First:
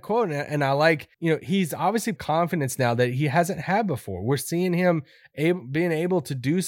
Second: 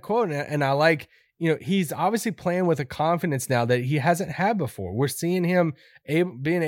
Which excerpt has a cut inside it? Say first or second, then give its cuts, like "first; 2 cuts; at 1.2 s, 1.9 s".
first; 2 cuts; at 1.1 s, 2.2 s